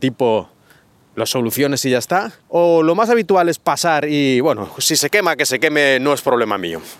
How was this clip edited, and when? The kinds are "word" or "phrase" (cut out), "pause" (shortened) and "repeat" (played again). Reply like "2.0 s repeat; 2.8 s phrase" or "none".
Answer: 2.4 s pause